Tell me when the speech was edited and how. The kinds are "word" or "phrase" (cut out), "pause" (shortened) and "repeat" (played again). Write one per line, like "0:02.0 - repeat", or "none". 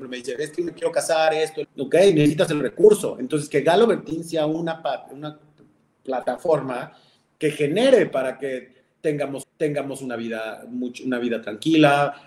0:01.6 - word
0:09.4 - repeat